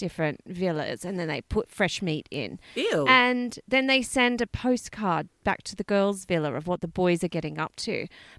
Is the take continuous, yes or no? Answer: yes